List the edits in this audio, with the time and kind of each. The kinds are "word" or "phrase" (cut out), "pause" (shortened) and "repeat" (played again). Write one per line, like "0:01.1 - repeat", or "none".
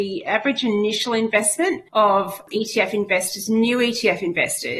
0:01.9 - pause